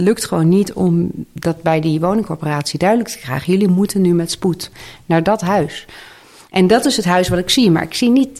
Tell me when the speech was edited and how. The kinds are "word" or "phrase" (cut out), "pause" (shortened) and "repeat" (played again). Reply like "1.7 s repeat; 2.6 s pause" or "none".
none